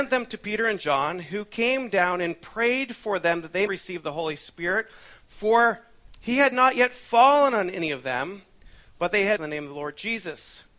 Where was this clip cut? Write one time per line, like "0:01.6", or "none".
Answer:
0:03.7
0:09.4